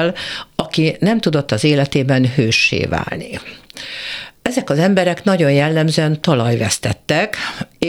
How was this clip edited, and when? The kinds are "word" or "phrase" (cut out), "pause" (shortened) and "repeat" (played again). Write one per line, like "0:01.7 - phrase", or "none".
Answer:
none